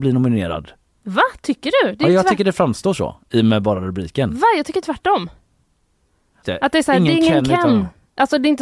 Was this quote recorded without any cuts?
no; 1 cut; at 6.4 s

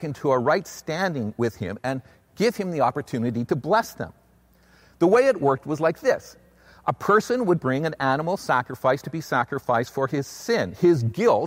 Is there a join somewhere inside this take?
no; 0 cuts

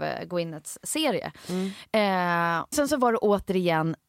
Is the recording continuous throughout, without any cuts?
no; 1 cut; at 2.7 s

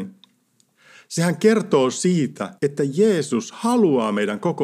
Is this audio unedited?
no; 1 cut; at 2.6 s

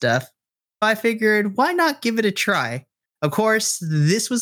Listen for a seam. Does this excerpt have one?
no; 0 cuts

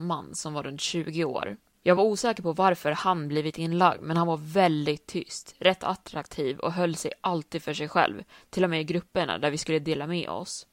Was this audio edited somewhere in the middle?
no; 0 cuts

